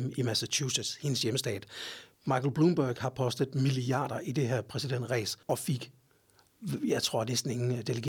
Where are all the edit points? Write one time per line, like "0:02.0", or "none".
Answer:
0:05.4